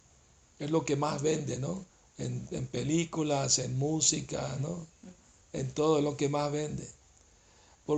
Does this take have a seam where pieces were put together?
yes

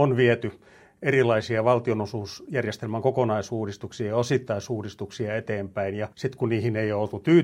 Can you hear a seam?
yes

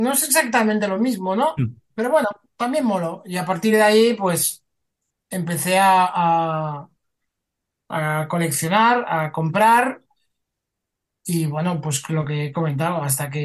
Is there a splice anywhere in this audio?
no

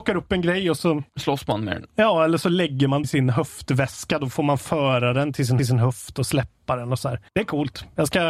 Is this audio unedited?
no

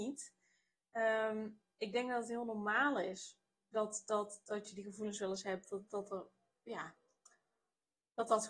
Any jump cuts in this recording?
no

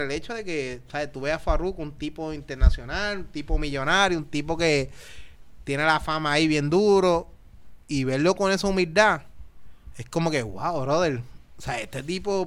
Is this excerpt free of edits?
yes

